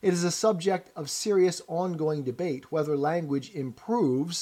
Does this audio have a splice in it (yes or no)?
no